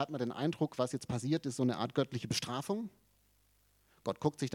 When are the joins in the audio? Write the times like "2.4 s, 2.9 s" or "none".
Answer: none